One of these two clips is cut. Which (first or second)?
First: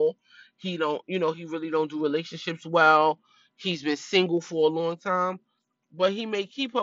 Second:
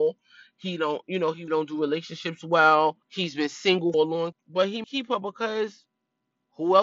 second